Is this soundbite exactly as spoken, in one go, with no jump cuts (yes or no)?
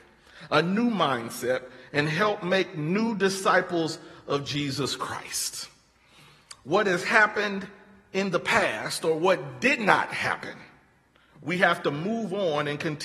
yes